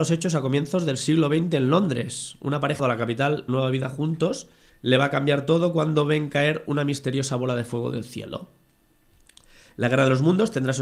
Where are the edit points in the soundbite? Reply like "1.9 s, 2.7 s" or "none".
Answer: 2.8 s, 3.5 s, 4.7 s